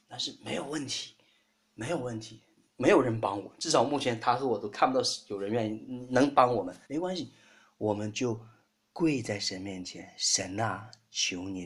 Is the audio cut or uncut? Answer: cut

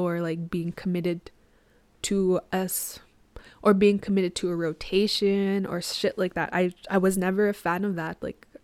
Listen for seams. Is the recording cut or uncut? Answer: uncut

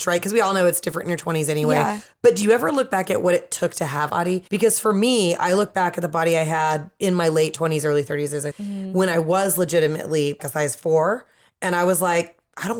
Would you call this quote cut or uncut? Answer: cut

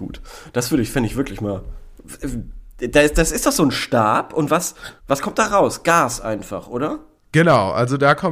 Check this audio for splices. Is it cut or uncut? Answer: cut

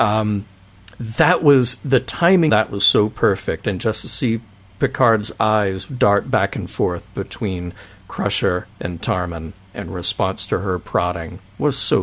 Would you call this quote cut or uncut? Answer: cut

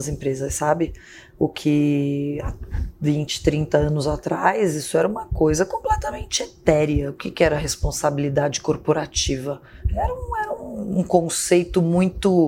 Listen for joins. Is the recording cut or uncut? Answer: uncut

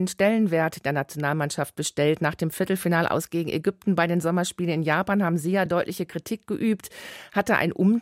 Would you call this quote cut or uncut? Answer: uncut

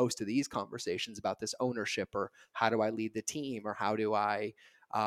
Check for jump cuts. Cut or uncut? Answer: uncut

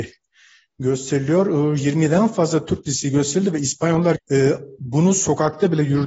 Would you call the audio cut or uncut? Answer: cut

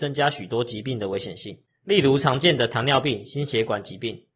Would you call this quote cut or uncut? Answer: cut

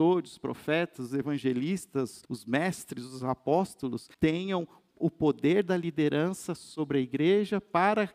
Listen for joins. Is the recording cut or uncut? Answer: cut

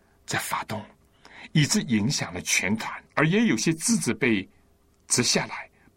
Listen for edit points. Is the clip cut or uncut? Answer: cut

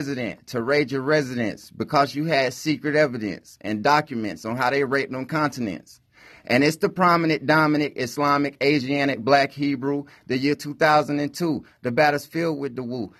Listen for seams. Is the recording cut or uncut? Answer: uncut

